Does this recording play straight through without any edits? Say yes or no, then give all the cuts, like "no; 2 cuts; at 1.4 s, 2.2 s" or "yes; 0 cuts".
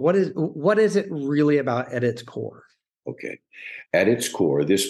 yes; 0 cuts